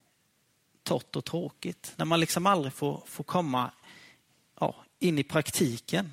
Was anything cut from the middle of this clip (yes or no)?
no